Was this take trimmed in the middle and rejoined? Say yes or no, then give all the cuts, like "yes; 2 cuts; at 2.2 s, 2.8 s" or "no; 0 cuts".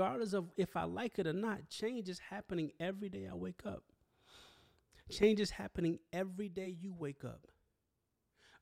no; 0 cuts